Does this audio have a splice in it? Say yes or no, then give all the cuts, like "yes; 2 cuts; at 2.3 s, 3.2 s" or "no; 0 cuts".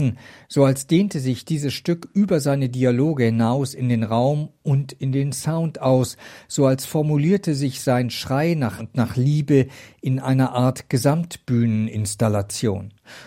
yes; 1 cut; at 8.8 s